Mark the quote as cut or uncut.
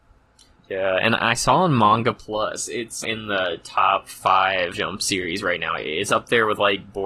cut